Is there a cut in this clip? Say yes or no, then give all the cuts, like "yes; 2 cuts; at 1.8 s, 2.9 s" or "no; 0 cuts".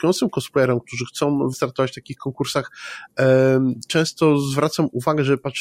yes; 1 cut; at 1.5 s